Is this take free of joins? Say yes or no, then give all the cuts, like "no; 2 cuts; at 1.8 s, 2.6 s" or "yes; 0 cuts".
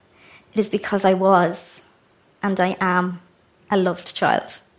yes; 0 cuts